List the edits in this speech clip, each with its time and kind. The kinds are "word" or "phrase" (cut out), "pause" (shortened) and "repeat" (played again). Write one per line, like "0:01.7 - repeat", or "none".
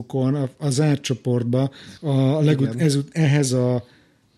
0:02.0 - pause